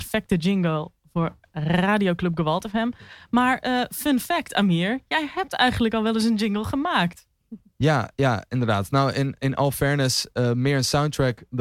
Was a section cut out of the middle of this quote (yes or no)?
no